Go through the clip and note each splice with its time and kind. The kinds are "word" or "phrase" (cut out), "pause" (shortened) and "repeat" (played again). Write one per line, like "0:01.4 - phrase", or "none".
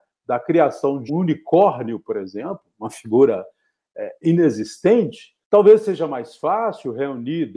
0:01.1 - word
0:05.4 - pause